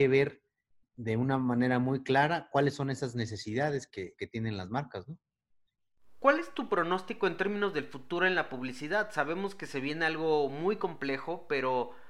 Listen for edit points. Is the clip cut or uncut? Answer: cut